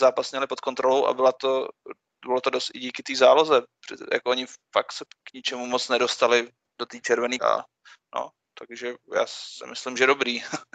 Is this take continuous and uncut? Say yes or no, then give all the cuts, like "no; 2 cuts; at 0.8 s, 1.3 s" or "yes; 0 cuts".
no; 2 cuts; at 5.1 s, 7.4 s